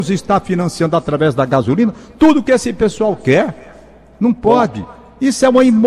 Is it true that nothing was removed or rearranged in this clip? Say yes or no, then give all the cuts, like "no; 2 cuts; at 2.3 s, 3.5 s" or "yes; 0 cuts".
yes; 0 cuts